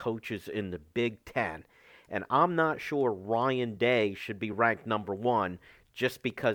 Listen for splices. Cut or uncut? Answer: uncut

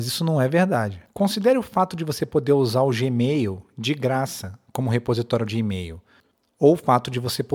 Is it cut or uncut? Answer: cut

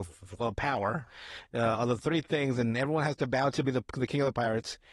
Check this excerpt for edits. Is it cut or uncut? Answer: cut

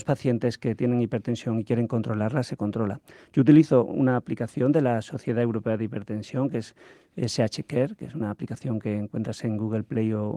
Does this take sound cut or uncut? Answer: uncut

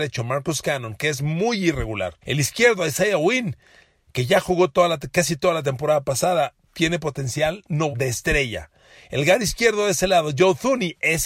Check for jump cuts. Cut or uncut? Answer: cut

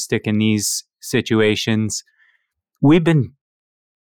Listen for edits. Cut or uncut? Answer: cut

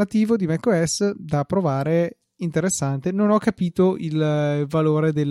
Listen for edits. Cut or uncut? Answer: uncut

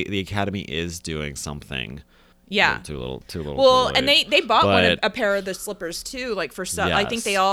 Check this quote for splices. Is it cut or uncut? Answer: cut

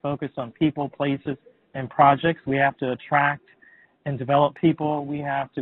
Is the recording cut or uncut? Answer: uncut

